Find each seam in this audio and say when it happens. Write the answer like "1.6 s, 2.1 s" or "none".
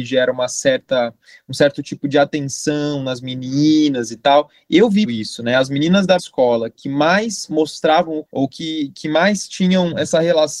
5.0 s, 6.2 s, 8.3 s